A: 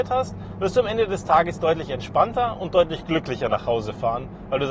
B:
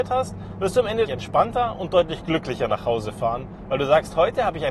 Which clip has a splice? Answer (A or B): B